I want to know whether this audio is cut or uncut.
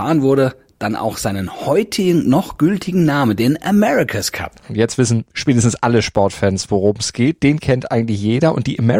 uncut